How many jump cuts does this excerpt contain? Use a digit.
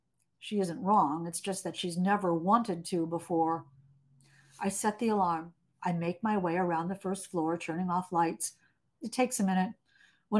0